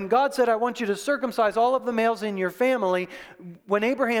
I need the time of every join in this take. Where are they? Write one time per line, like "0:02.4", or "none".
none